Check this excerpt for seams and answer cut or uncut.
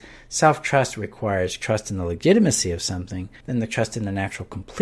cut